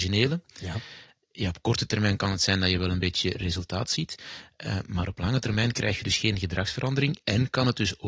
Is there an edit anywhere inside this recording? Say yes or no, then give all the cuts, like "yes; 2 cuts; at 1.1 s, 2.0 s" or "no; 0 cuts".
no; 0 cuts